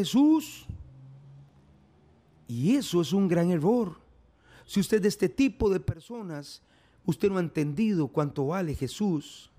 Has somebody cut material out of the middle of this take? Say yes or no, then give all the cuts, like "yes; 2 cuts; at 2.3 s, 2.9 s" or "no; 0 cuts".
no; 0 cuts